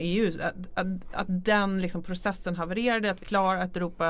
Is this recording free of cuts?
no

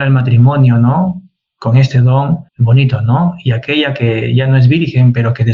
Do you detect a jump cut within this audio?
yes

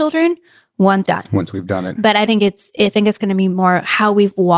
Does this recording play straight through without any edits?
no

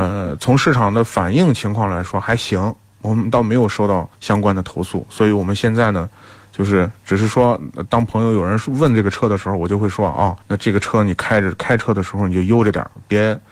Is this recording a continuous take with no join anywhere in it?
no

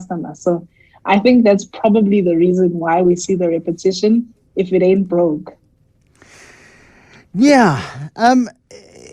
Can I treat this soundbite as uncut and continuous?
yes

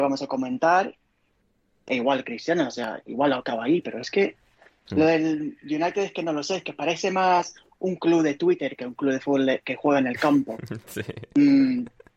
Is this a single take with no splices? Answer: yes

